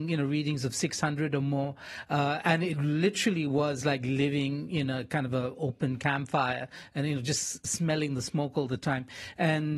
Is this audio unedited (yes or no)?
yes